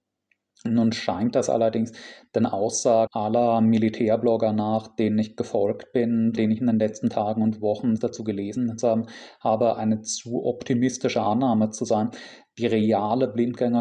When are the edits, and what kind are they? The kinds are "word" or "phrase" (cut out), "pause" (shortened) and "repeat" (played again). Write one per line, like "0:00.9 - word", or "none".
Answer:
0:03.1 - word
0:06.4 - word
0:08.0 - word